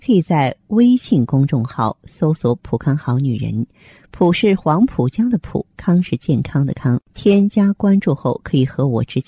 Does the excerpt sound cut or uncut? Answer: cut